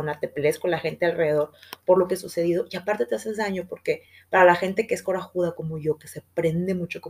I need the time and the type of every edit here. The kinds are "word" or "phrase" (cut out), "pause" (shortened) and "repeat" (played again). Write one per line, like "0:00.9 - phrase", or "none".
none

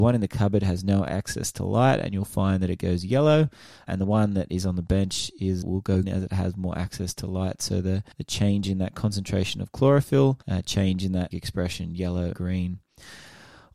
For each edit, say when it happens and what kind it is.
0:03.9 - word
0:05.6 - word
0:06.0 - word
0:08.1 - pause
0:10.4 - pause
0:11.3 - word
0:12.3 - word

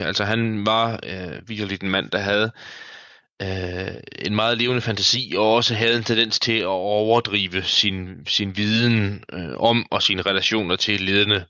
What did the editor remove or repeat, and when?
none

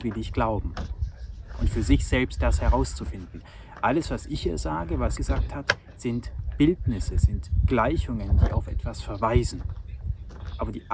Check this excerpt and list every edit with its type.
0:05.2 - word

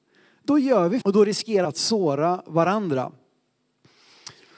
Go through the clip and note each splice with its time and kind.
0:01.0 - word
0:01.6 - word

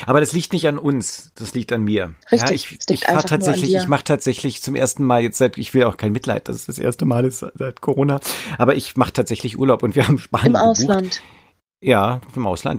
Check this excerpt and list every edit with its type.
0:02.2 - pause

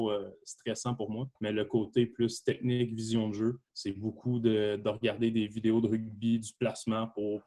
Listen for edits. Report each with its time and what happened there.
0:01.4 - pause
0:03.7 - pause

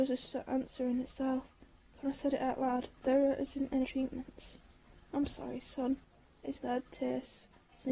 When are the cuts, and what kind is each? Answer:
0:03.8 - word
0:06.6 - word

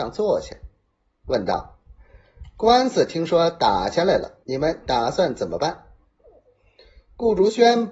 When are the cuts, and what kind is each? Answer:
0:04.4 - pause

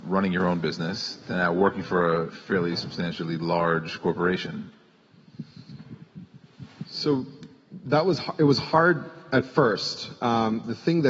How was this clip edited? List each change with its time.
0:02.3 - word

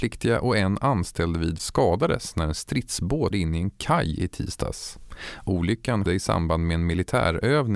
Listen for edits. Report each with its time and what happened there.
0:01.6 - word
0:03.3 - word
0:06.1 - word

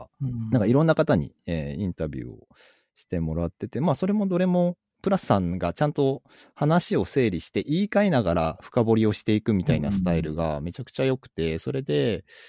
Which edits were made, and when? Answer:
0:05.2 - word

